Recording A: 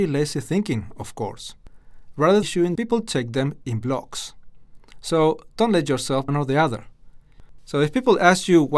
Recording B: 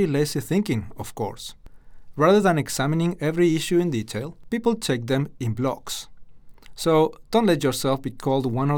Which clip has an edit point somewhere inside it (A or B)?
A